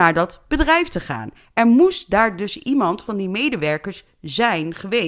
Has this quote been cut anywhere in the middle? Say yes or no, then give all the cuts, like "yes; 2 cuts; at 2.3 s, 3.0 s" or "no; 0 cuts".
no; 0 cuts